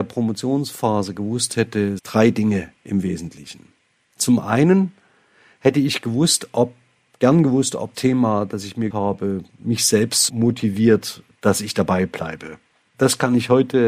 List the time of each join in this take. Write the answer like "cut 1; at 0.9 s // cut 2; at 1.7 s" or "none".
cut 1; at 2.0 s // cut 2; at 7.9 s // cut 3; at 8.9 s // cut 4; at 10.3 s